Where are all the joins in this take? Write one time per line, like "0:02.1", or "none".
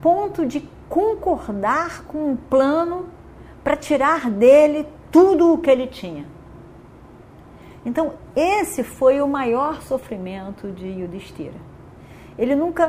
none